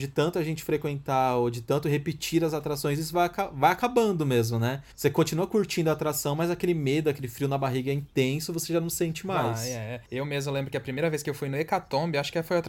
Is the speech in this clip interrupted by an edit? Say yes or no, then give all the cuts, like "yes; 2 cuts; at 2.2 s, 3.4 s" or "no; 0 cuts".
yes; 2 cuts; at 4.9 s, 10.1 s